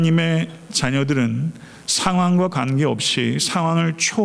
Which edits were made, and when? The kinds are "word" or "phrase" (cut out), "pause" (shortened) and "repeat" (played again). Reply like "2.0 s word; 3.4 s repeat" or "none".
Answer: none